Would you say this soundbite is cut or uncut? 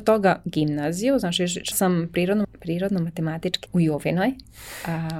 cut